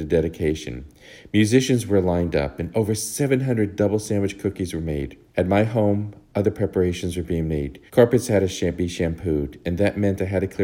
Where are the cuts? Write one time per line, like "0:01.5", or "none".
0:05.3
0:07.9